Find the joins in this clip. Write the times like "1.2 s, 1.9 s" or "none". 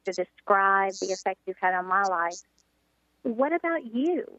none